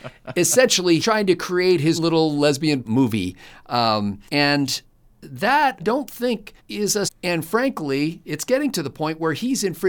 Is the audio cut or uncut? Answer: cut